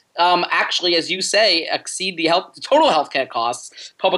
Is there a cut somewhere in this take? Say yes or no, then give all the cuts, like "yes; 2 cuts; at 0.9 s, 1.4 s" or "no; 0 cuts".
no; 0 cuts